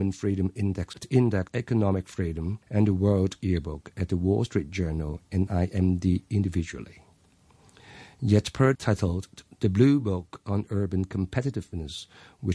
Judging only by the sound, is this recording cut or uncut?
cut